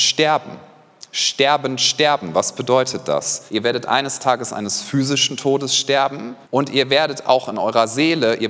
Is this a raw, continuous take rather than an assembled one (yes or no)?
no